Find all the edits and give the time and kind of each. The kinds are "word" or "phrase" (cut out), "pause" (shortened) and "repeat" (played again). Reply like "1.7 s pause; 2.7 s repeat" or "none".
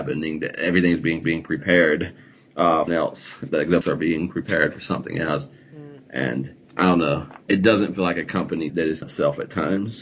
1.2 s repeat; 2.9 s phrase; 3.8 s word; 6.6 s pause; 7.4 s pause; 8.7 s word; 9.0 s phrase